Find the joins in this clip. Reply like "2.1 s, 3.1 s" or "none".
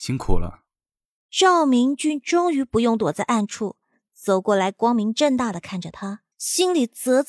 6.3 s

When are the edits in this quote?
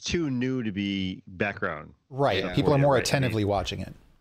none

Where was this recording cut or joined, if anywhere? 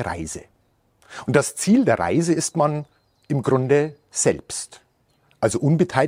none

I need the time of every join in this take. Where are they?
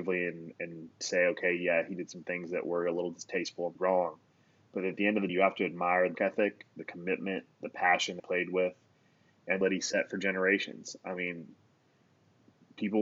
3.8 s, 5.3 s, 6.1 s, 8.2 s, 9.6 s

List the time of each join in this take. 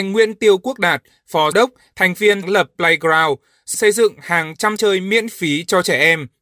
1.5 s, 2.4 s, 2.7 s, 3.7 s, 4.8 s

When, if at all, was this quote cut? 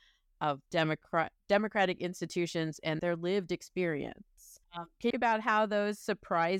3.0 s, 4.6 s, 5.1 s

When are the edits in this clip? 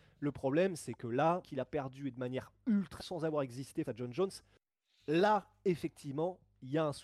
1.4 s, 3.0 s, 3.8 s

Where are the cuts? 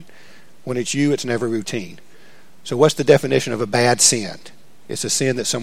none

